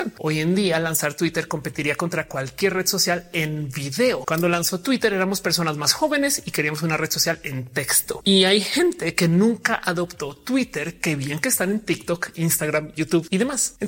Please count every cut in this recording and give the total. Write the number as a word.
zero